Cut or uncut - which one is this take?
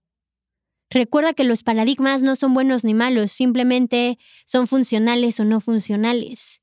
uncut